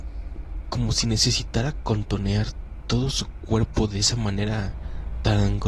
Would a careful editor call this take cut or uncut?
uncut